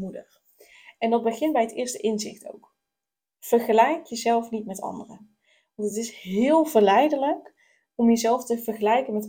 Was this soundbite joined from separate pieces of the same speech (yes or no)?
no